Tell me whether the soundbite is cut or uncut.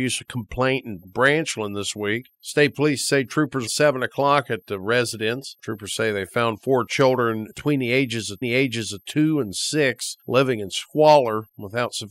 cut